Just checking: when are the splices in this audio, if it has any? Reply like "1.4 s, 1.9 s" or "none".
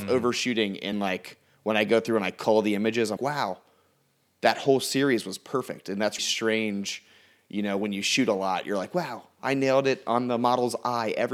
0.9 s, 3.2 s, 6.2 s

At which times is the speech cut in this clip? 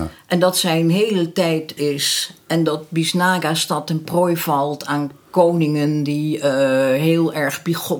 1.8 s

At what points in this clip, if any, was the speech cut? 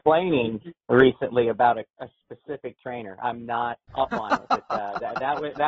3.8 s

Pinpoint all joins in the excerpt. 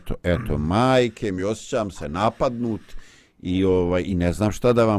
none

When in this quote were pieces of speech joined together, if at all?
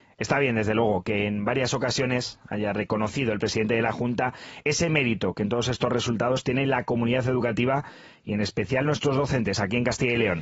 none

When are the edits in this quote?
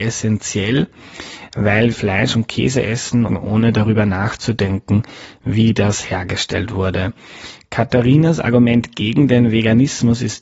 1.9 s, 3.3 s

